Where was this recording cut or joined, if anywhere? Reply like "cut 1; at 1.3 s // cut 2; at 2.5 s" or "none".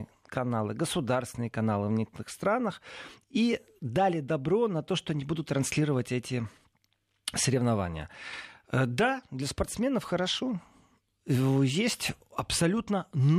none

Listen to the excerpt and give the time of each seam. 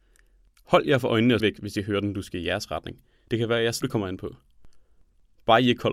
cut 1; at 1.4 s // cut 2; at 3.8 s

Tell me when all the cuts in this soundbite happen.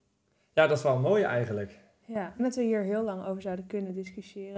cut 1; at 2.4 s

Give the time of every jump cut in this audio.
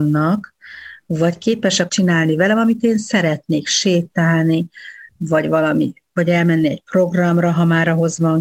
cut 1; at 1.9 s

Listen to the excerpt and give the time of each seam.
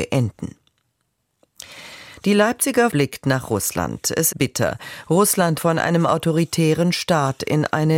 cut 1; at 2.9 s // cut 2; at 4.3 s // cut 3; at 5.6 s

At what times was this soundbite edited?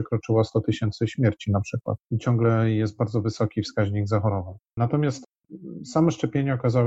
cut 1; at 2.0 s // cut 2; at 4.7 s

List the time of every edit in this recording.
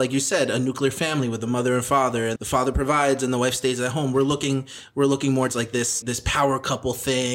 cut 1; at 2.4 s // cut 2; at 5.5 s // cut 3; at 6.0 s

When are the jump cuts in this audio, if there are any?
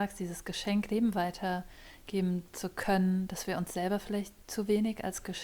cut 1; at 4.4 s

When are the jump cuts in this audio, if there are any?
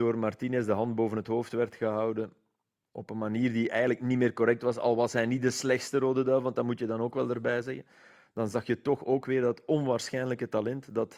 none

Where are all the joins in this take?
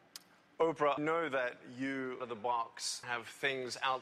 cut 1; at 1.0 s // cut 2; at 2.2 s // cut 3; at 3.0 s

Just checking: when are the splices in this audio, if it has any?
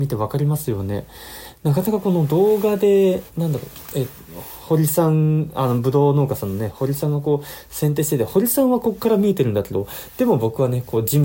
cut 1; at 3.3 s

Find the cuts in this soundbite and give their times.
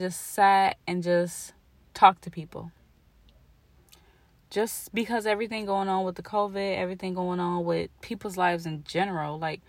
none

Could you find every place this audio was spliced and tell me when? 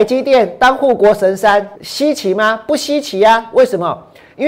cut 1; at 1.8 s

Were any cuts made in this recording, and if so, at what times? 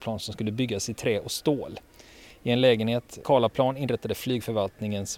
cut 1; at 3.2 s

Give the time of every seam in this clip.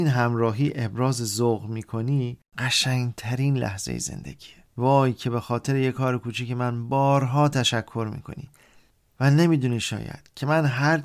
cut 1; at 2.5 s // cut 2; at 4.7 s

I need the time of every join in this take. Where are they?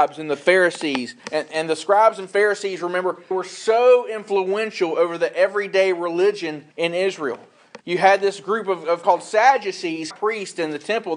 cut 1; at 1.2 s // cut 2; at 3.3 s // cut 3; at 6.7 s // cut 4; at 7.8 s // cut 5; at 9.0 s // cut 6; at 10.1 s

